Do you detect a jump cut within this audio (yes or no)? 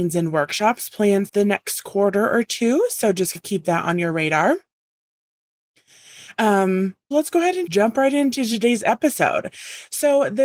yes